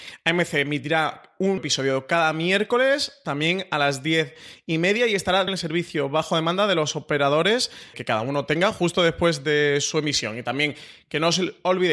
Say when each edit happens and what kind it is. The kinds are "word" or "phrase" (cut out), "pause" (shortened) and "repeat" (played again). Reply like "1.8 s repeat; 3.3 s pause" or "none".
1.6 s word; 5.5 s word; 7.9 s word